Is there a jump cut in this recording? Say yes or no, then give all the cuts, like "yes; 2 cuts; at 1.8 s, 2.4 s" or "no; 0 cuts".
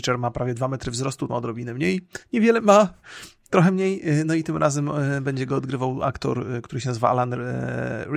yes; 2 cuts; at 1.3 s, 2.6 s